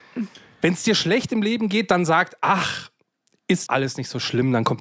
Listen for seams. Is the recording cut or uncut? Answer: cut